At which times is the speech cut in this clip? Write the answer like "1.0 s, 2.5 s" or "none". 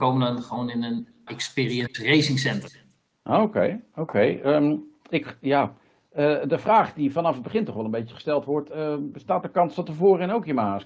1.3 s